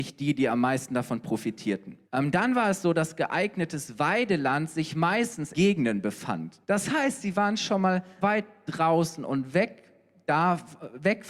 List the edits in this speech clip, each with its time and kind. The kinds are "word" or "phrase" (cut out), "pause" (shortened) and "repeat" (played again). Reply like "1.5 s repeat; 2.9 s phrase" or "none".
2.0 s pause; 5.5 s phrase; 6.6 s pause; 8.2 s word